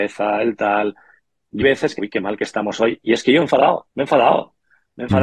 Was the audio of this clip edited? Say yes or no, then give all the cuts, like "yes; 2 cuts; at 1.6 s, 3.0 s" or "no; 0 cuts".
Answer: yes; 4 cuts; at 1.6 s, 2.0 s, 3.4 s, 3.9 s